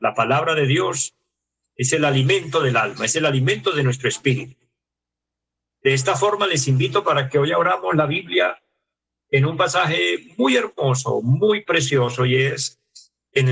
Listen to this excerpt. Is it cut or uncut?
uncut